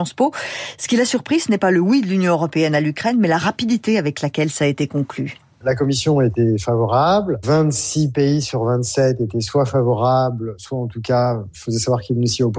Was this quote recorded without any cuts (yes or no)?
yes